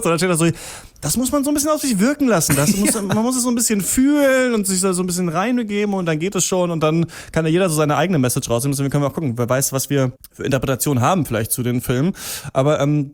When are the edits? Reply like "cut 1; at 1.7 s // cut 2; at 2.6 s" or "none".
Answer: cut 1; at 10.2 s